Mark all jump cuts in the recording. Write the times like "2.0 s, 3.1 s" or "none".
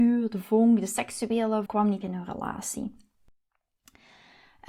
1.7 s, 2.0 s